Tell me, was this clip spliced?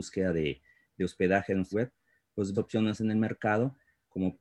yes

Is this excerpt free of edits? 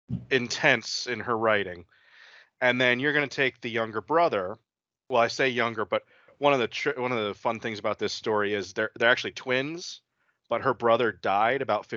yes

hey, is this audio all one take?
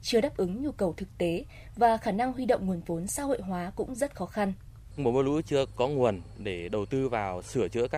yes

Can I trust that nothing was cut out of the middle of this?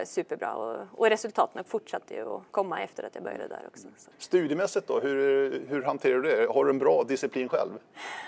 no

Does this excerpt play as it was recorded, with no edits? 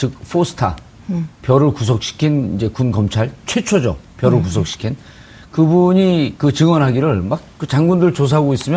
yes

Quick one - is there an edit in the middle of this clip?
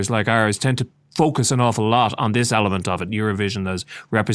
no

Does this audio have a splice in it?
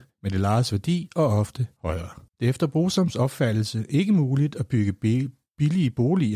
yes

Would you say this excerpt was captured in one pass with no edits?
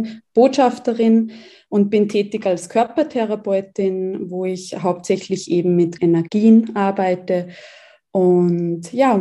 no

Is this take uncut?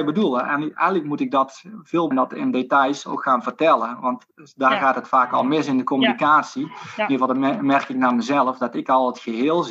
no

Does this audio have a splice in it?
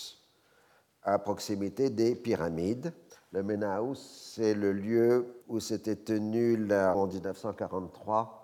yes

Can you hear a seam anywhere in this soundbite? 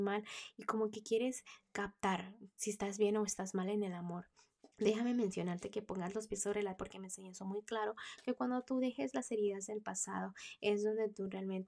yes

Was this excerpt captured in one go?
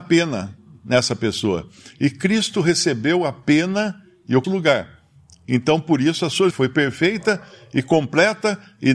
no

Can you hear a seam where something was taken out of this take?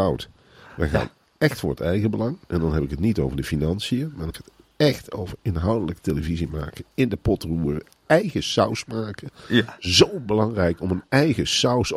yes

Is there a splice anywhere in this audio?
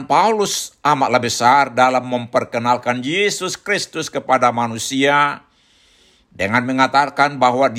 no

